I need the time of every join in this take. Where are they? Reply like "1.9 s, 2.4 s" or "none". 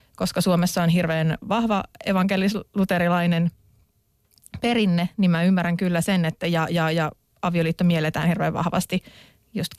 none